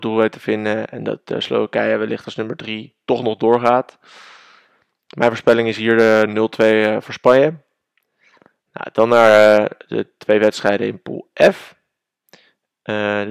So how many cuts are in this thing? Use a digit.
0